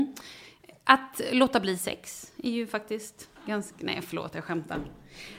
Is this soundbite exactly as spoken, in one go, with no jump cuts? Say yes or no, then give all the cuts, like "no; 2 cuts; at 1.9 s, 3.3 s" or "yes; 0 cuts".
yes; 0 cuts